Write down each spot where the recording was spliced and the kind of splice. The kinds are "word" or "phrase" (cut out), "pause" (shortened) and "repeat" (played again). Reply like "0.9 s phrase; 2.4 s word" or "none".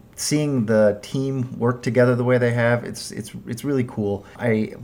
none